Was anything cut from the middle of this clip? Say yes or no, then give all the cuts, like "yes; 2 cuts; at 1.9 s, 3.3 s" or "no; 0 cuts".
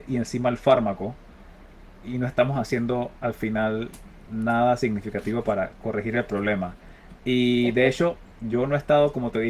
no; 0 cuts